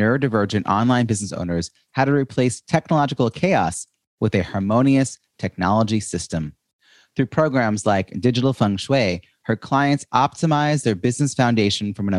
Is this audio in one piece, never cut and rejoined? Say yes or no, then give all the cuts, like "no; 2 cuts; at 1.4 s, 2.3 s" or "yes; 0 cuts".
yes; 0 cuts